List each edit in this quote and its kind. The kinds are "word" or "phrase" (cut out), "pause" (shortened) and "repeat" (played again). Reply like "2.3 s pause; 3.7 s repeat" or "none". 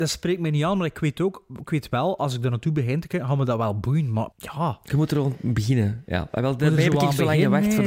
4.3 s pause